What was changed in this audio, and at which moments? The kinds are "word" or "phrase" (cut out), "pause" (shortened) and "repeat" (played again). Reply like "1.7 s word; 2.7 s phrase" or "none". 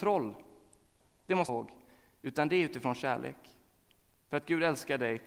1.5 s phrase